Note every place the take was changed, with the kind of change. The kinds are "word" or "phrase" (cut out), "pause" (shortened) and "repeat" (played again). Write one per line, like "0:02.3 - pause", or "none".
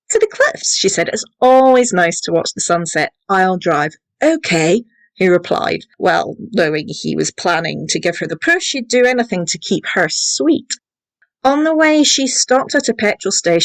none